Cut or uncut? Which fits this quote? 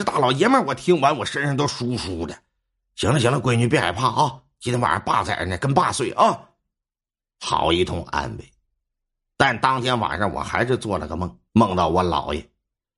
cut